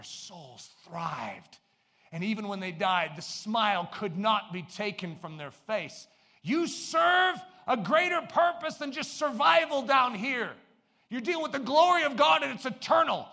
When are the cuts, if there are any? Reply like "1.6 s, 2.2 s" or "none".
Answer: none